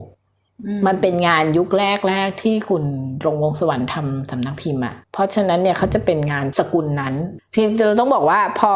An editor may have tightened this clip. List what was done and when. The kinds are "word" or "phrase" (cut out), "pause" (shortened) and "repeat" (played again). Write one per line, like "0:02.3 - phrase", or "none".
0:05.0 - pause